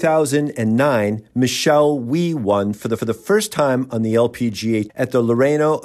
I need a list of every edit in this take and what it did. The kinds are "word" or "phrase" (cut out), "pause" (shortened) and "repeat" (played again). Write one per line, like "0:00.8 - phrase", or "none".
0:03.0 - repeat
0:04.9 - word